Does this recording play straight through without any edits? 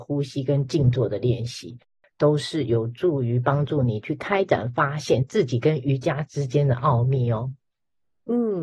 yes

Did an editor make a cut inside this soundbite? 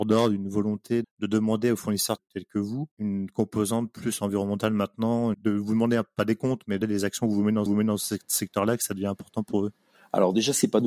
yes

